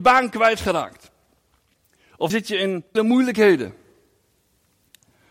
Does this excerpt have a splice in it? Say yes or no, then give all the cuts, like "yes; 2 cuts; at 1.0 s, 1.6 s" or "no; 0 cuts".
yes; 2 cuts; at 2.3 s, 3.0 s